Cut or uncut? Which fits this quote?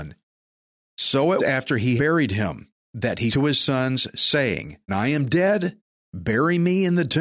cut